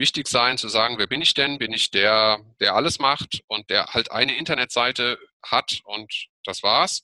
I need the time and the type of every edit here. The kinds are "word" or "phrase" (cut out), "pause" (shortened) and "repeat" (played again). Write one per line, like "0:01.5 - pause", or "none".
none